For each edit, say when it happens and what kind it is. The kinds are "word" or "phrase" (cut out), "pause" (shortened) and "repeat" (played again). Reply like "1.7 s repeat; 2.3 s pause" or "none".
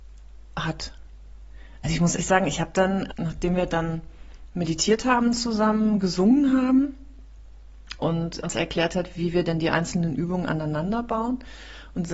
2.2 s word; 3.1 s word; 8.0 s word; 8.4 s word